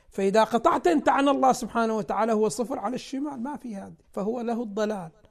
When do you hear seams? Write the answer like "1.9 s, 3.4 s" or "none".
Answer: 4.0 s